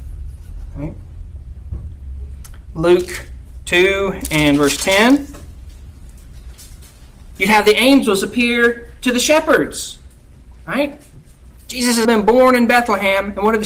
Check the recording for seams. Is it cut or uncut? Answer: cut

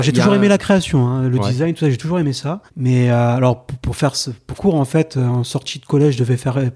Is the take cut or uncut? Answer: cut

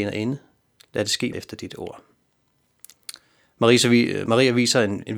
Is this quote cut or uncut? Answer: cut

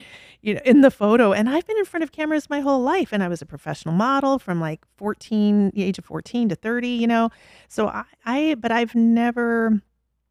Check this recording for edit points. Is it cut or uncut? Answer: uncut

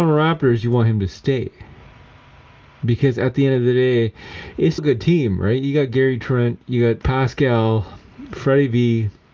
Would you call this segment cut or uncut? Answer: cut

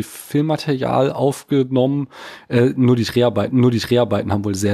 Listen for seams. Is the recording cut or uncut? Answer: cut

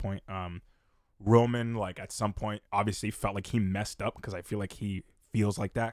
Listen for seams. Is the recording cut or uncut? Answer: cut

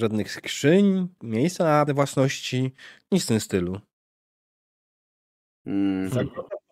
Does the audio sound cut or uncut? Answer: cut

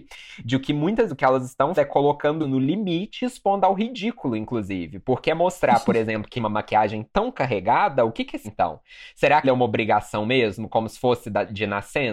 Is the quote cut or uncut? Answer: cut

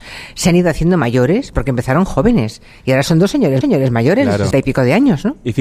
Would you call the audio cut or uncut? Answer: cut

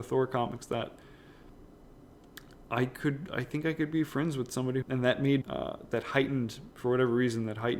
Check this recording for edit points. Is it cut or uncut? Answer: cut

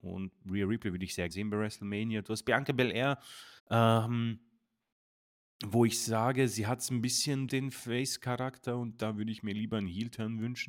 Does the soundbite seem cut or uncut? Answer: cut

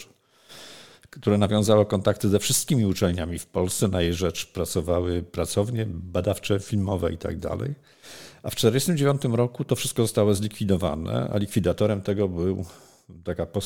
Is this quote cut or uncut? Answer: uncut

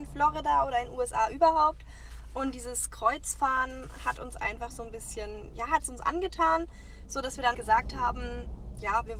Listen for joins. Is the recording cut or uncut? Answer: cut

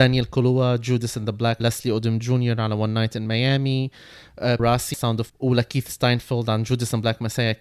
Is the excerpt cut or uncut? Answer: cut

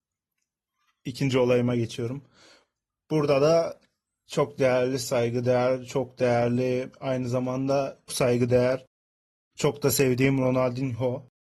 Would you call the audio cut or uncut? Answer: cut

